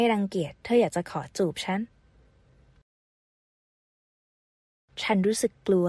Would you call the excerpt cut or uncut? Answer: uncut